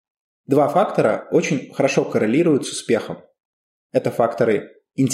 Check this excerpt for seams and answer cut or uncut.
uncut